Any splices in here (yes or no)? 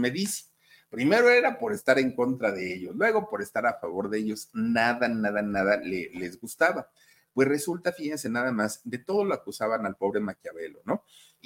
no